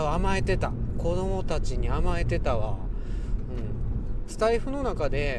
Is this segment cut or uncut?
uncut